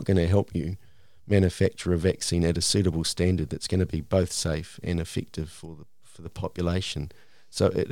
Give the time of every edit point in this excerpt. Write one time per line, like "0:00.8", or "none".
none

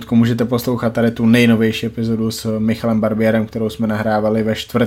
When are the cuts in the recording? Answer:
none

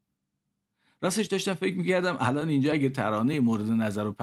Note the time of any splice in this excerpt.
none

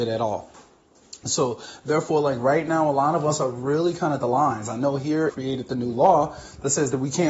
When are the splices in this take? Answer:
0:04.2
0:05.3

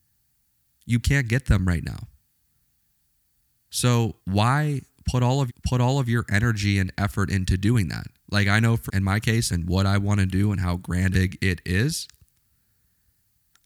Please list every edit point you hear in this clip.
0:01.0
0:04.2
0:05.5
0:08.2
0:08.9
0:09.5
0:11.1

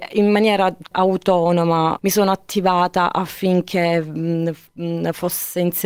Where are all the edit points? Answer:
0:00.9
0:02.0

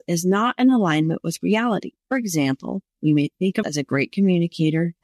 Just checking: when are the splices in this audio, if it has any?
0:02.0
0:03.6

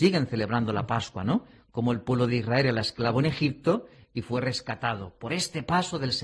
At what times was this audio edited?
none

